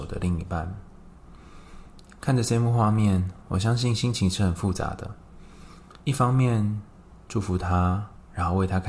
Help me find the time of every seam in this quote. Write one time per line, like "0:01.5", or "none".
0:06.0